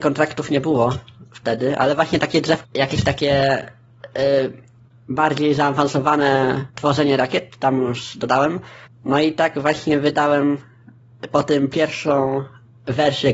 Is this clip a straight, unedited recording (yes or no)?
no